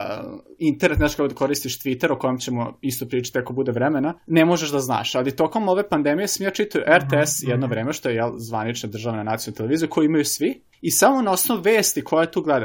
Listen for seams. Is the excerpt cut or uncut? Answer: cut